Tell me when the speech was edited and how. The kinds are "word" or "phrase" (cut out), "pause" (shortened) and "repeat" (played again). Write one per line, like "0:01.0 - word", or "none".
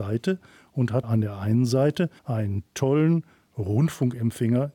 0:02.2 - pause